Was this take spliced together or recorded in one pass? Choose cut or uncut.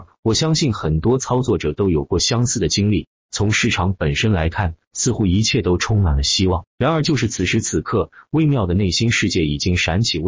cut